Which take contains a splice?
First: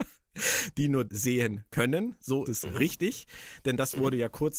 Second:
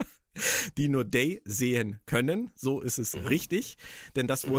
first; 2 cuts; at 1.1 s, 2.5 s

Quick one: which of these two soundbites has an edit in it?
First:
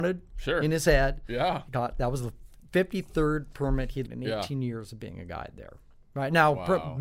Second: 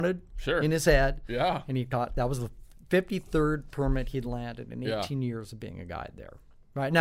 first; 2 cuts; at 1.7 s, 4.1 s

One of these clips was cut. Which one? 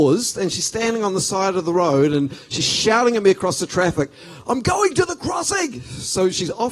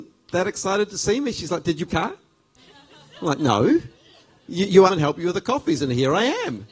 second; 3 cuts; at 1.9 s, 2.6 s, 4.9 s

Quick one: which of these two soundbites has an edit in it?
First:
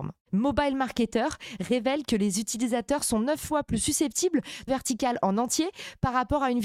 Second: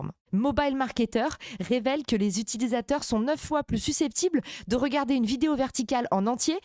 first; 1 cut; at 4.7 s

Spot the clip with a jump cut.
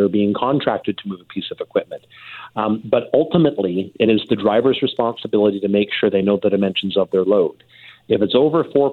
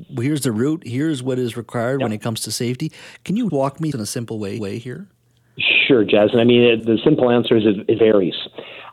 second; 5 cuts; at 3.5 s, 3.9 s, 4.6 s, 6.8 s, 8.0 s

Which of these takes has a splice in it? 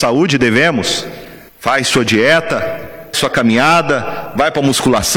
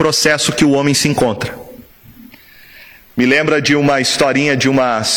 first; 2 cuts; at 1.5 s, 3.1 s

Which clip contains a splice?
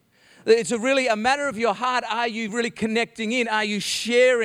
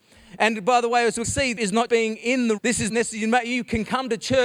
second; 5 cuts; at 1.2 s, 1.6 s, 1.9 s, 2.6 s, 2.9 s

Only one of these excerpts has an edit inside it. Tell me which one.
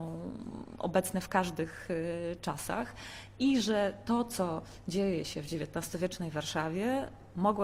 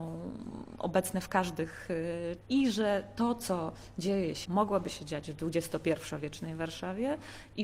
second; 2 cuts; at 2.4 s, 4.5 s

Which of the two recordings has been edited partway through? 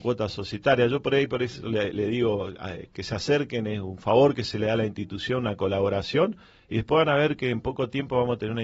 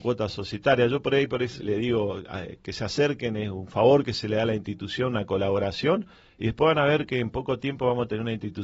second; 1 cut; at 1.6 s

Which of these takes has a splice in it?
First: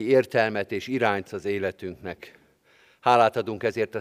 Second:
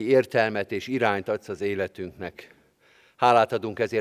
first; 1 cut; at 1.2 s

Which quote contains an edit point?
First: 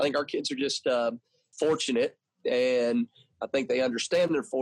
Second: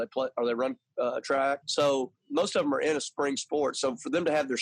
first; 1 cut; at 1.5 s

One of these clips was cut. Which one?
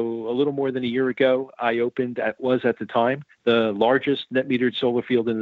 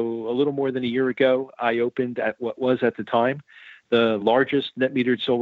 first; 2 cuts; at 2.4 s, 3.3 s

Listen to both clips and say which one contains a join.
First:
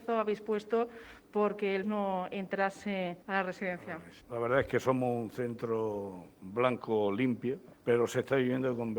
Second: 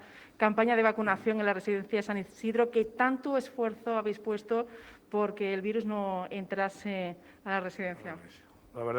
first; 4 cuts; at 1.8 s, 3.2 s, 4.2 s, 7.7 s

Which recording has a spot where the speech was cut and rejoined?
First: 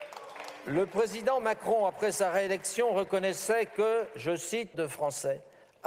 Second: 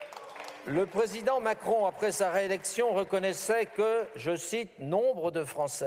first; 1 cut; at 4.7 s

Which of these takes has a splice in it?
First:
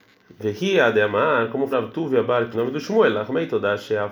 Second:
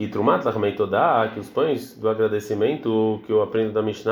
first; 2 cuts; at 1.7 s, 2.5 s

